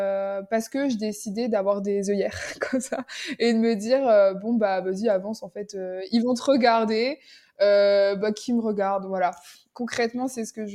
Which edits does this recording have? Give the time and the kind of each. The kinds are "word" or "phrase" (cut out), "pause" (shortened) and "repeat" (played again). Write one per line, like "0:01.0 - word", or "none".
none